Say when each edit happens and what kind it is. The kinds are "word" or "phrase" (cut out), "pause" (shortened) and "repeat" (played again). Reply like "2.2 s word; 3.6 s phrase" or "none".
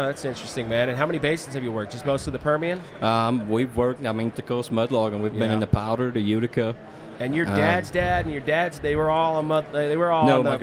4.3 s word; 8.8 s word